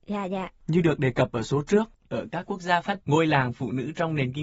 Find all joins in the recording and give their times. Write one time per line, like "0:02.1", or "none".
0:03.0